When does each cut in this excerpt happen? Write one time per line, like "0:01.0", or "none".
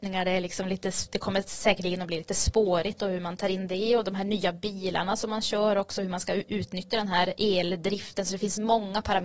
none